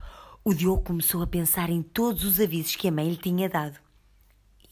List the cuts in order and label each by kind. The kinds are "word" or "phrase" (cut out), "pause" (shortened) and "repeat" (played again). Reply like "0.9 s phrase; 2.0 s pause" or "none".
none